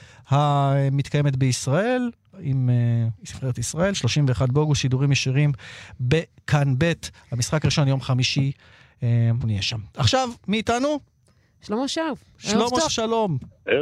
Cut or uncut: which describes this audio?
cut